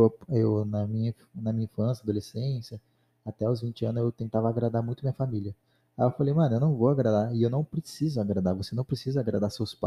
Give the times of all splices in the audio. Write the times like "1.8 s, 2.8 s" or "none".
none